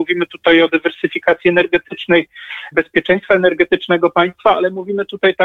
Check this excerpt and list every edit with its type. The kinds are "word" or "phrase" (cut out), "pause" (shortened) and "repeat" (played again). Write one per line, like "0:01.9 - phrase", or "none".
0:02.7 - word

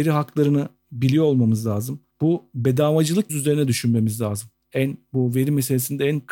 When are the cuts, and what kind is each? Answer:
0:02.1 - pause
0:03.3 - word

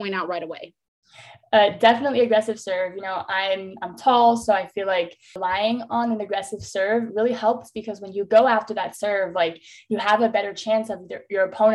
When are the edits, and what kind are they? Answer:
none

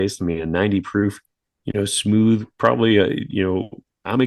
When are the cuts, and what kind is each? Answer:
none

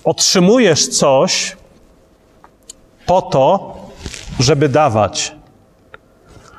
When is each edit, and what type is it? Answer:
none

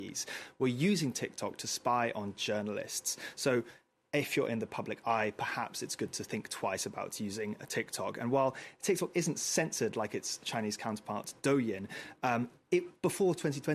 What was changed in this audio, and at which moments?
none

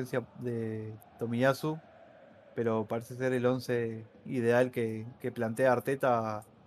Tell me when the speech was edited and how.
0:05.2 - pause

